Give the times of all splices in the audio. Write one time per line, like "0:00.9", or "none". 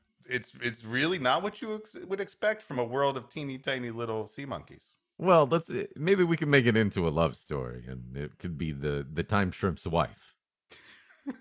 none